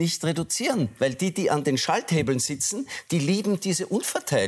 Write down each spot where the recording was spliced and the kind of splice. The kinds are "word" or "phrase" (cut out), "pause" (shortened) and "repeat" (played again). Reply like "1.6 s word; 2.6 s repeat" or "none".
none